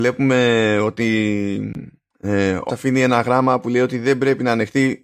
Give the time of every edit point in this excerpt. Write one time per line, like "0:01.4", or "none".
0:02.7